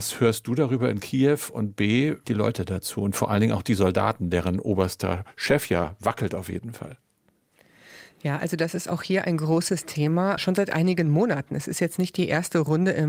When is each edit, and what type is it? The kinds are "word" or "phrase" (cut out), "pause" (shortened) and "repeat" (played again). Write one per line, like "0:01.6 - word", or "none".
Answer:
0:02.2 - phrase
0:10.4 - word